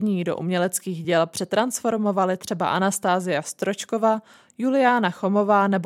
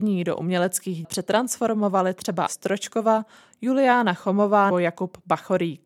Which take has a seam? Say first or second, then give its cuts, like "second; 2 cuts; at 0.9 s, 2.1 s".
second; 3 cuts; at 1.0 s, 2.5 s, 4.7 s